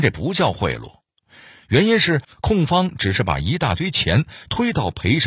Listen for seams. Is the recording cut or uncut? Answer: uncut